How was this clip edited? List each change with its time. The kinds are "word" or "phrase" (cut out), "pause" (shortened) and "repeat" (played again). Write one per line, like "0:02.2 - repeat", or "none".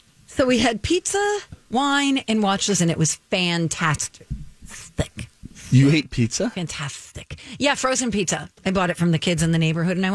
0:02.8 - word